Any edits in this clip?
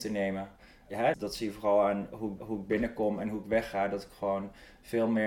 yes; 2 cuts; at 1.1 s, 2.4 s

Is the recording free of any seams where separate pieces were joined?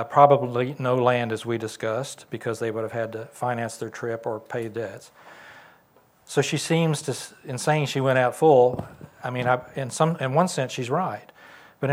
yes; 0 cuts

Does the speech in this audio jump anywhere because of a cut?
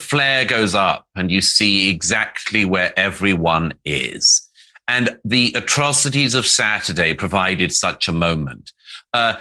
no; 0 cuts

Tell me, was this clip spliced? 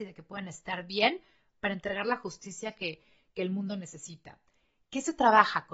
no; 0 cuts

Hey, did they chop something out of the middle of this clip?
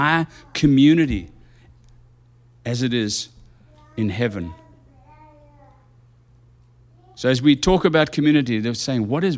no; 0 cuts

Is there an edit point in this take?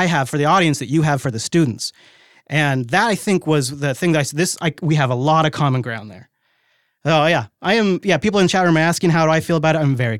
no; 0 cuts

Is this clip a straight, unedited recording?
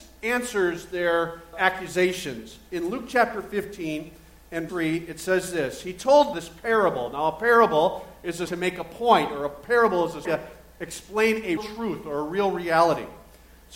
no; 6 cuts; at 1.5 s, 4.7 s, 6.3 s, 8.5 s, 10.2 s, 11.6 s

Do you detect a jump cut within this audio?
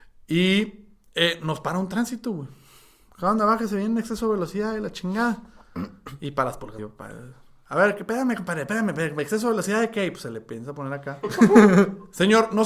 yes; 1 cut; at 6.8 s

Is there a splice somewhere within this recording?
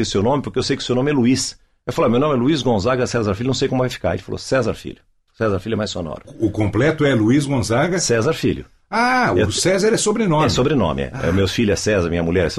no; 0 cuts

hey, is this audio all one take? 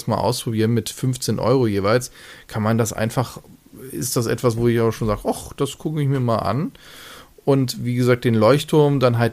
yes; 0 cuts

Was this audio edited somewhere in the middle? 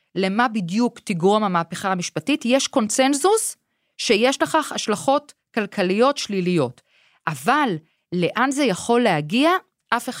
no; 0 cuts

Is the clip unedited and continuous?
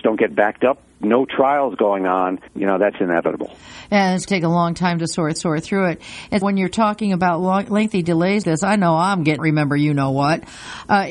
no; 7 cuts; at 1.0 s, 2.5 s, 4.3 s, 5.4 s, 6.4 s, 8.4 s, 9.4 s

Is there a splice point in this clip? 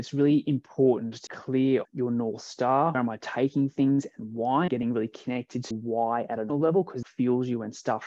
yes; 7 cuts; at 1.3 s, 1.8 s, 2.9 s, 4.7 s, 5.7 s, 6.5 s, 7.0 s

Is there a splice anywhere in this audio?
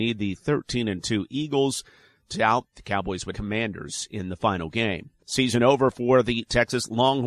yes; 3 cuts; at 2.3 s, 3.3 s, 5.2 s

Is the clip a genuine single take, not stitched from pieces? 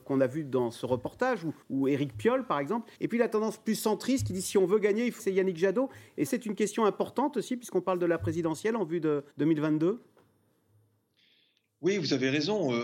no; 5 cuts; at 1.6 s, 3.0 s, 5.2 s, 6.3 s, 9.3 s

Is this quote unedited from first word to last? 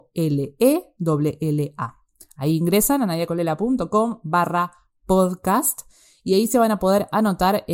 yes; 0 cuts

